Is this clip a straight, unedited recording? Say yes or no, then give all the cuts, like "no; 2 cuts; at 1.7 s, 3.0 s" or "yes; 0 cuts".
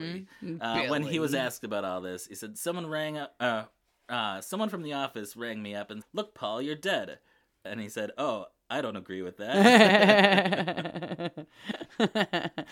no; 1 cut; at 6.0 s